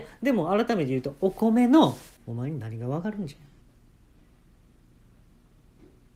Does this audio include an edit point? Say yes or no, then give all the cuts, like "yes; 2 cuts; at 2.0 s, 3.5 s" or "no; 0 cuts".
yes; 1 cut; at 2.2 s